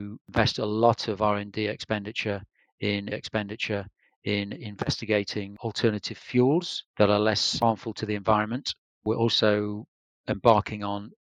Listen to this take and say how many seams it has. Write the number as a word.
two